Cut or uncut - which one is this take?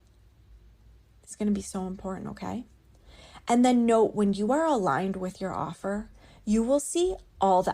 uncut